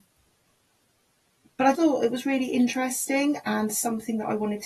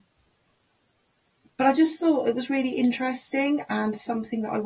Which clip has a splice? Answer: first; 1 cut; at 1.7 s

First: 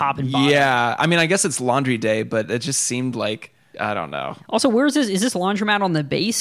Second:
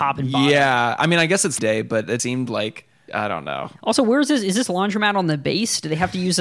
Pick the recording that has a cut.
second; 2 cuts; at 1.6 s, 2.2 s

